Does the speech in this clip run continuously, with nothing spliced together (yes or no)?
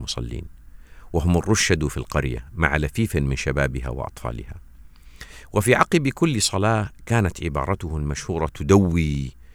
yes